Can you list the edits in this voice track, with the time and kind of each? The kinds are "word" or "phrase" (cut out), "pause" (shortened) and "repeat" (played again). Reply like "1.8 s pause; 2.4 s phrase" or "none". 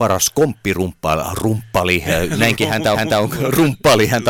2.9 s repeat